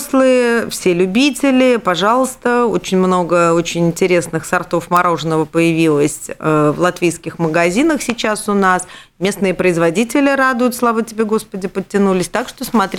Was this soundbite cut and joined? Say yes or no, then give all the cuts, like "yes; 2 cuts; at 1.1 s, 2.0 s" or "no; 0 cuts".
no; 0 cuts